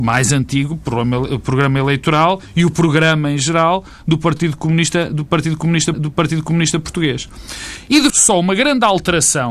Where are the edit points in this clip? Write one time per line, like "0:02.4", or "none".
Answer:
0:05.9
0:08.1